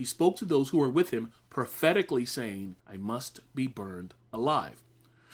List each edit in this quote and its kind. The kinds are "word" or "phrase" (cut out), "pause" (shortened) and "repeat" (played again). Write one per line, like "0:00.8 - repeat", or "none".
0:02.8 - pause